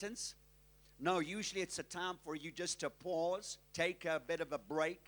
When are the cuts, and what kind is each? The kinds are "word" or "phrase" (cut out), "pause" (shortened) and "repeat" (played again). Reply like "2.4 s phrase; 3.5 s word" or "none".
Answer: 3.6 s pause